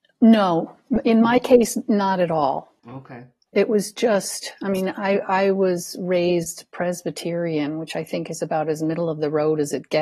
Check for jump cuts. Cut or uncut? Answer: cut